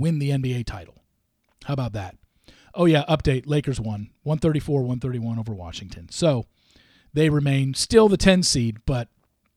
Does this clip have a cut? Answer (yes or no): no